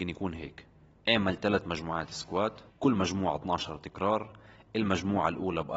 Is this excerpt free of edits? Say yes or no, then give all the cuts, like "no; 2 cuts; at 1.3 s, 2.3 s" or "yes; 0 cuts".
no; 1 cut; at 2.7 s